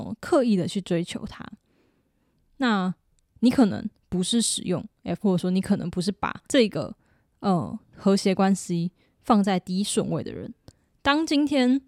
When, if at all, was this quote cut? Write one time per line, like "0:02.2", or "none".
0:05.2
0:06.4